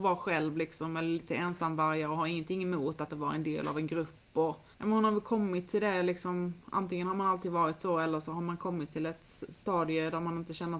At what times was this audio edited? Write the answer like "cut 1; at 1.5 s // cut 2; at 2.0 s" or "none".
cut 1; at 3.1 s // cut 2; at 4.7 s